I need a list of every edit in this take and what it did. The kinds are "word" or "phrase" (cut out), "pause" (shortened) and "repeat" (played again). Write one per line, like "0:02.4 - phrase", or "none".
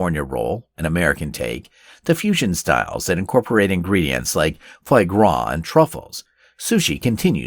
none